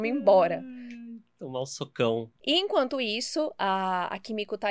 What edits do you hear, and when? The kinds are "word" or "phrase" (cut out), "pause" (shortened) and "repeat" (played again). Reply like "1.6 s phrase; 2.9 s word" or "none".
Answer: 2.4 s pause